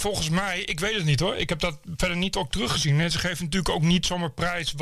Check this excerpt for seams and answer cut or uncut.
uncut